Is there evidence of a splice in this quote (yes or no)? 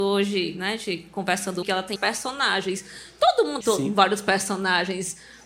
yes